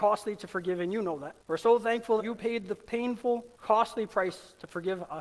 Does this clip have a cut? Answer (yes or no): yes